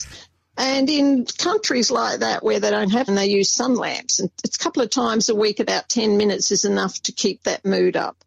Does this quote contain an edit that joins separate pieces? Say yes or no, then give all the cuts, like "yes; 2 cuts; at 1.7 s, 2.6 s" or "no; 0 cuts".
yes; 1 cut; at 3.1 s